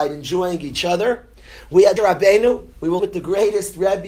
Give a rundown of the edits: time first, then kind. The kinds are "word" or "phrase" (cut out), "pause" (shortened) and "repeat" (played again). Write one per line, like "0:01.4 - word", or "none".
0:02.0 - word
0:03.0 - word